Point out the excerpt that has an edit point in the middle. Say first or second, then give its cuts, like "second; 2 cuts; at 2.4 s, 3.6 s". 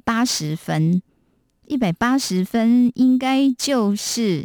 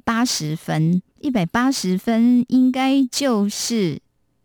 second; 1 cut; at 1.1 s